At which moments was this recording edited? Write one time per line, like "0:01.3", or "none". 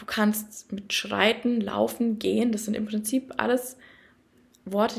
none

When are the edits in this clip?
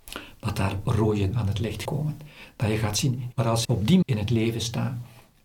0:01.3
0:01.8
0:03.3
0:03.6
0:04.0

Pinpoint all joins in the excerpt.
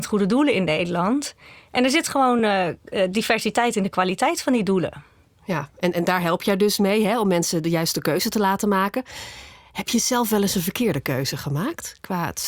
none

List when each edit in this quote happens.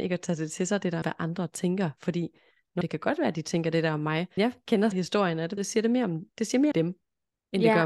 0:01.0
0:02.8
0:04.4
0:04.9
0:05.6
0:06.7

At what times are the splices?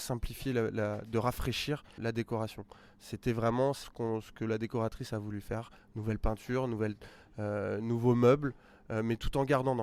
0:02.0
0:03.8

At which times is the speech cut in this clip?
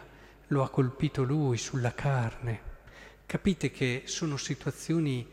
none

